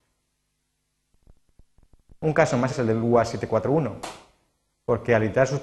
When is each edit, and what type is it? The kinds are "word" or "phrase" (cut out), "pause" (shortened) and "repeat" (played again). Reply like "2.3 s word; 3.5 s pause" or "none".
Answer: 2.7 s word